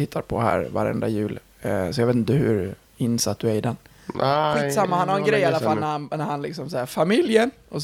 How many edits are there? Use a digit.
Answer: 1